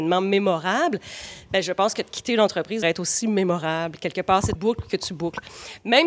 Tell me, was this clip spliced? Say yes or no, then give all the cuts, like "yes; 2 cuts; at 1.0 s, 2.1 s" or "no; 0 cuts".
yes; 2 cuts; at 2.8 s, 4.6 s